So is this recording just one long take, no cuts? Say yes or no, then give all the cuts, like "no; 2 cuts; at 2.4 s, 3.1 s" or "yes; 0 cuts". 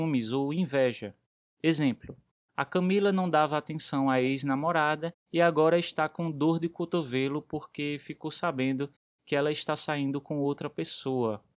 yes; 0 cuts